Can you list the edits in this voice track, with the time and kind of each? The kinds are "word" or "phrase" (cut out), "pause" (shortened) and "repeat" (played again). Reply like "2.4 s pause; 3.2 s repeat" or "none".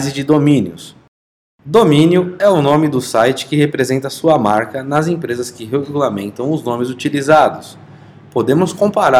none

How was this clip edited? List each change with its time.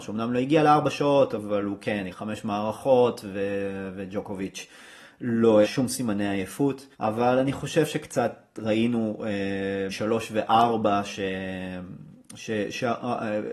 2.1 s word; 5.6 s word; 6.9 s pause; 9.9 s word

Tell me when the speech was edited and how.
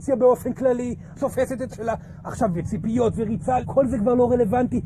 1.1 s word; 1.7 s word; 2.5 s word; 3.6 s word

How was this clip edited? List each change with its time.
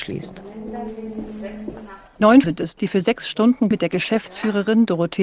2.4 s word; 2.8 s word; 3.7 s word

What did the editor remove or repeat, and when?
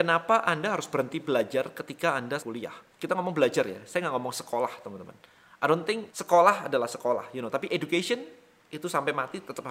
2.4 s word; 6.1 s word

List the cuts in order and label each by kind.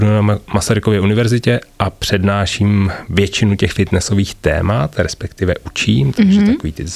none

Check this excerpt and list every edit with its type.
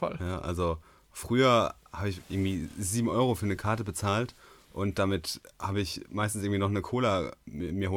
none

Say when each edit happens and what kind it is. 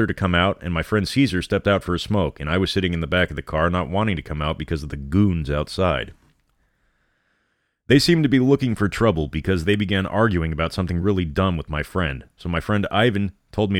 none

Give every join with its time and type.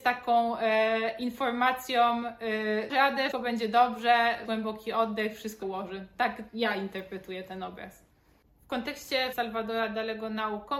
2.9 s word; 3.3 s word; 4.4 s word; 5.6 s word; 6.5 s word; 9.3 s word

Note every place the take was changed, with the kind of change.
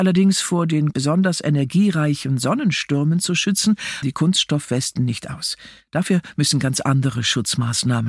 0.9 s phrase; 4.0 s word

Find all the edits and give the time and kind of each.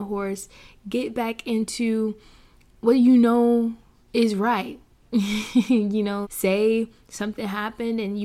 6.2 s word

